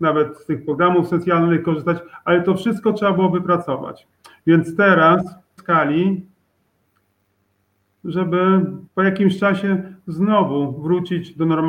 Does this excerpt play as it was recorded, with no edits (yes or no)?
no